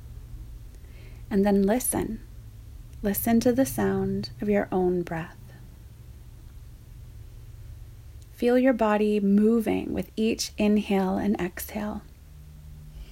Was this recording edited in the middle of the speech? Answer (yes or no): no